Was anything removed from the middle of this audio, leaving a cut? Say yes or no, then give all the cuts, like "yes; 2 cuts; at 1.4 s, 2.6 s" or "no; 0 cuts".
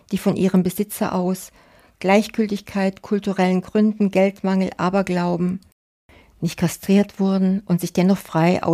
no; 0 cuts